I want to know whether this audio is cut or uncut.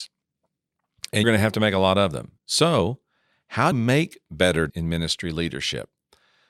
cut